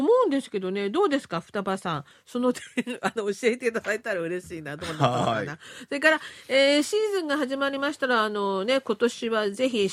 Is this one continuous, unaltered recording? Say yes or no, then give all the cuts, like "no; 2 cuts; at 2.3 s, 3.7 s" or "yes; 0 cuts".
yes; 0 cuts